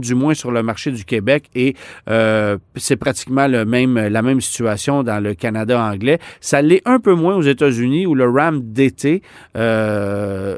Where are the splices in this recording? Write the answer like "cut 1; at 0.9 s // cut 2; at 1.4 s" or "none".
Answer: none

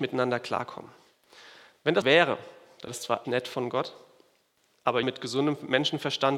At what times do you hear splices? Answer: cut 1; at 2.0 s // cut 2; at 2.9 s // cut 3; at 3.2 s // cut 4; at 5.0 s

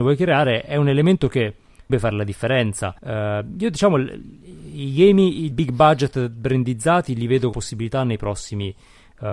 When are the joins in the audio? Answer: cut 1; at 1.9 s // cut 2; at 3.0 s // cut 3; at 5.5 s // cut 4; at 7.5 s

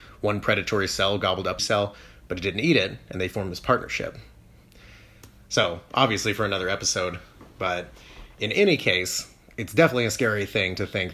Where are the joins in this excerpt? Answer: cut 1; at 1.6 s // cut 2; at 7.5 s

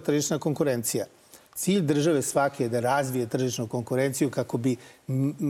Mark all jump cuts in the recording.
cut 1; at 1.4 s

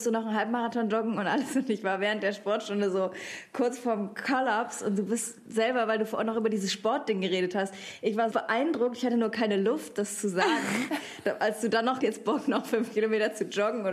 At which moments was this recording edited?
cut 1; at 8.3 s // cut 2; at 12.0 s

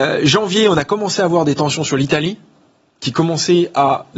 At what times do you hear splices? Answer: none

